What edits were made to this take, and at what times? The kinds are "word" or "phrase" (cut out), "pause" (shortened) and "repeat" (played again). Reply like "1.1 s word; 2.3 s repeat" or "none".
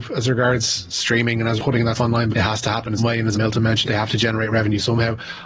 1.6 s word; 2.0 s word; 2.3 s word; 3.0 s word; 3.3 s word; 3.8 s word